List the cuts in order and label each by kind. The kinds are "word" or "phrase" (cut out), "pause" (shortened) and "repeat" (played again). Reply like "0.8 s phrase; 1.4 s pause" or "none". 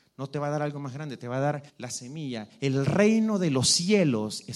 1.7 s pause